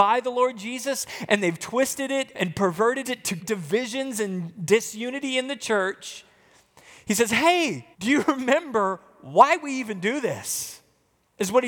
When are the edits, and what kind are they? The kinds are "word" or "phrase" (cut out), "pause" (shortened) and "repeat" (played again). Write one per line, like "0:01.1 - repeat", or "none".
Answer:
0:02.3 - word
0:03.0 - phrase
0:03.4 - word
0:07.9 - pause